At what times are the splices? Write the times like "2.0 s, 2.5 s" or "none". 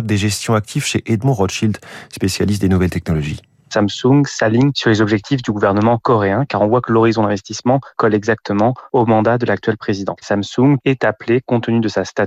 none

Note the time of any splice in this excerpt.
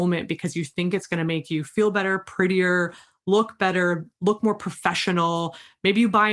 none

